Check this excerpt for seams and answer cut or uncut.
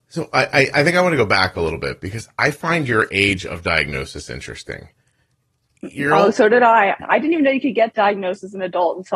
uncut